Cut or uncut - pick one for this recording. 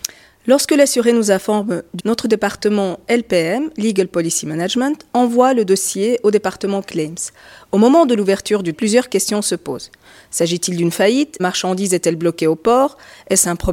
cut